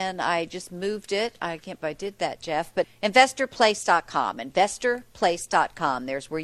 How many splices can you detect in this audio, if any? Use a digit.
2